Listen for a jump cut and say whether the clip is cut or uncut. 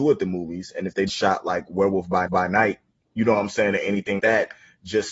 cut